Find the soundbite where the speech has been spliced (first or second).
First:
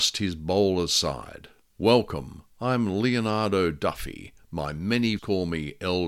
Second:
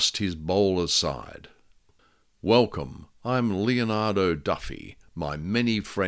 first